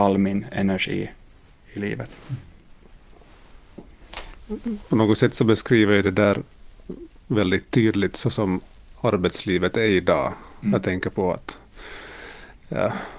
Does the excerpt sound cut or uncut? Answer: uncut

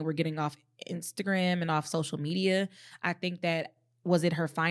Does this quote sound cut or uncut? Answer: uncut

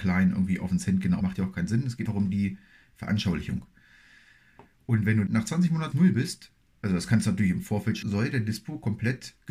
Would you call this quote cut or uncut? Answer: cut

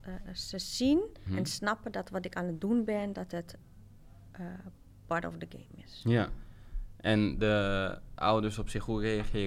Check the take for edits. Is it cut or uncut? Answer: cut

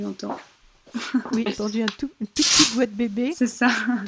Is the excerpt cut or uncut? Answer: cut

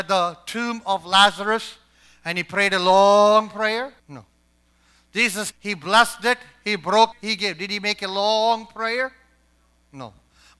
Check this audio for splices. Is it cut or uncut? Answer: cut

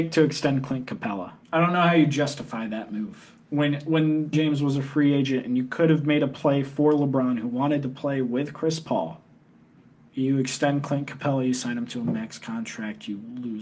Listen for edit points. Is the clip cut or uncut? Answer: cut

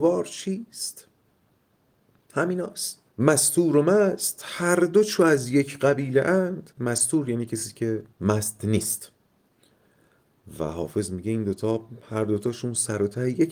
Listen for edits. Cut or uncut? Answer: cut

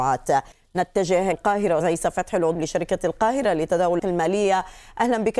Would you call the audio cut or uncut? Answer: cut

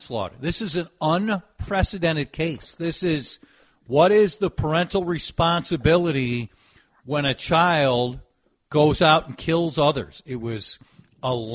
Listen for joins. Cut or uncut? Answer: uncut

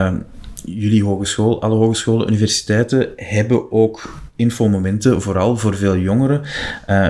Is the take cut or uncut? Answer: uncut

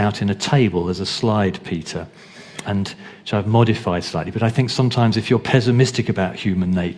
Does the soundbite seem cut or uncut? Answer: cut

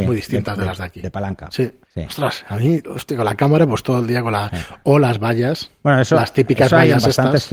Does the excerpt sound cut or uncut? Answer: cut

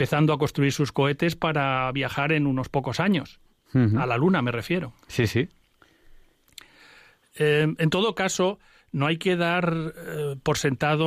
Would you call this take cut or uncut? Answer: uncut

